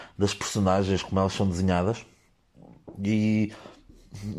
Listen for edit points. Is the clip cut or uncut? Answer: uncut